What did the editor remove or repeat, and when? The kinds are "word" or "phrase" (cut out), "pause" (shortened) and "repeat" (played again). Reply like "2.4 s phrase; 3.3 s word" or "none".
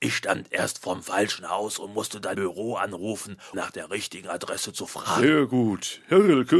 2.3 s word; 3.5 s word